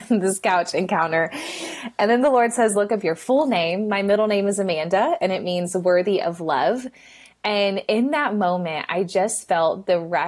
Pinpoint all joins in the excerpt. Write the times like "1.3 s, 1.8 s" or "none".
none